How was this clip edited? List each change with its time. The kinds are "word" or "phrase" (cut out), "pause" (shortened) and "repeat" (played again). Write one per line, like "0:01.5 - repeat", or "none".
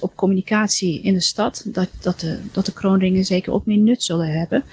none

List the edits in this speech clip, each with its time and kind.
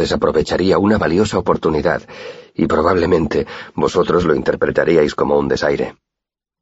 none

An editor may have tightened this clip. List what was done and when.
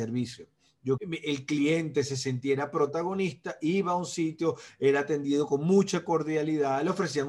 0:01.0 - word

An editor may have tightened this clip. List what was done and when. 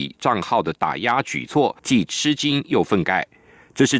0:01.8 - pause

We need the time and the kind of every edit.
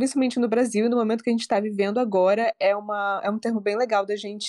none

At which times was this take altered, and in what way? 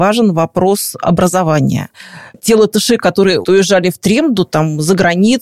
0:03.4 - word

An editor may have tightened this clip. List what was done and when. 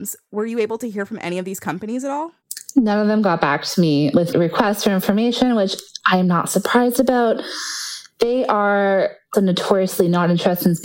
0:04.3 - word
0:09.3 - word

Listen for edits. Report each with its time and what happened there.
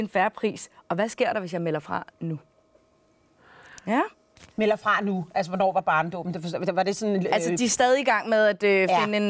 0:04.5 - pause

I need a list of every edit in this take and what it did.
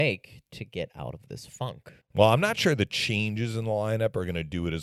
0:02.0 - pause

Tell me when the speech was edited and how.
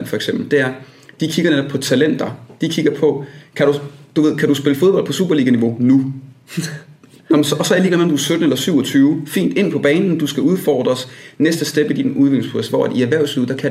none

